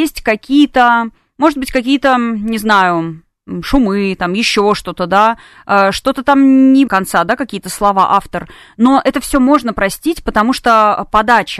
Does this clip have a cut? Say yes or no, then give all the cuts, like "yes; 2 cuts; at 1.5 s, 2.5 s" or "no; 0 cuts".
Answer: yes; 1 cut; at 6.9 s